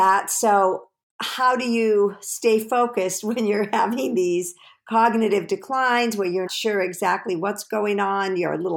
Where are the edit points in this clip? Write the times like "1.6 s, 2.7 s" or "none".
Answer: 6.5 s